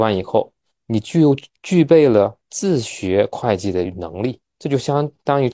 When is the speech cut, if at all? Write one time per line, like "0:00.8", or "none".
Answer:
0:02.4
0:04.5